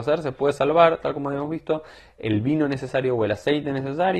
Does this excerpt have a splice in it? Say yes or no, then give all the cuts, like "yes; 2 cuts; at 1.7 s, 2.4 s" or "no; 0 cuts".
no; 0 cuts